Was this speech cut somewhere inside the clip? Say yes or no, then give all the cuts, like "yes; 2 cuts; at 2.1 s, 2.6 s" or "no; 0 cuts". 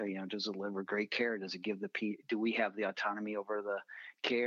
no; 0 cuts